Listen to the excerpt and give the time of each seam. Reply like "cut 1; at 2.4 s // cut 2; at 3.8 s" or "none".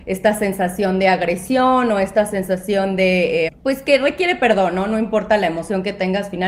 cut 1; at 3.5 s